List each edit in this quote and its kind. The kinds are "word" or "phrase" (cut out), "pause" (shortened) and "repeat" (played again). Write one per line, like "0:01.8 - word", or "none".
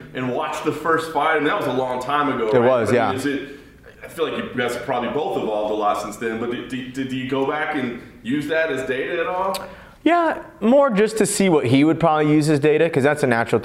0:03.9 - pause